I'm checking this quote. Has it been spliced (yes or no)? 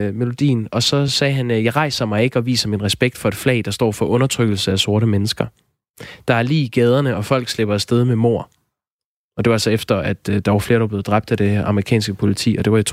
no